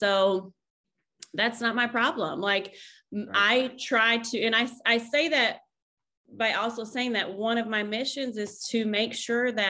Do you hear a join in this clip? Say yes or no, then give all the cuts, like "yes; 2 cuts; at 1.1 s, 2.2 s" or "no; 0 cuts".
no; 0 cuts